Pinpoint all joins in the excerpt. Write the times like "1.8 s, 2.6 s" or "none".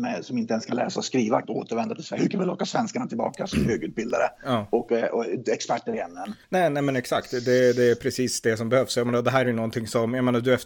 1.4 s, 6.4 s